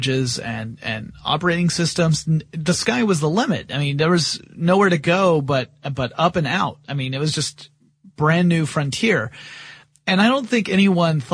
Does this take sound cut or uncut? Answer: uncut